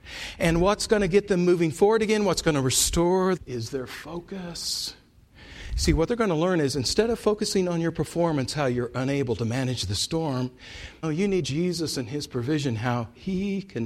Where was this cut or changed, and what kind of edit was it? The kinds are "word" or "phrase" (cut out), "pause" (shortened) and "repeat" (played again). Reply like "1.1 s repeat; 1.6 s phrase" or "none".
3.4 s phrase; 11.0 s word; 11.4 s phrase